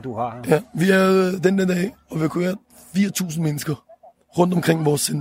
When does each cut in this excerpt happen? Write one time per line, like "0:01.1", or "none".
none